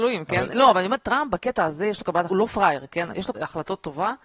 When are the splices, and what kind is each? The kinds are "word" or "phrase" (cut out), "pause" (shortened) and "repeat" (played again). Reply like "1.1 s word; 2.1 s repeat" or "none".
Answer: 2.3 s word; 3.3 s word

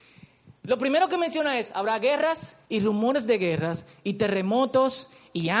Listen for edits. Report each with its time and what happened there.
2.6 s pause

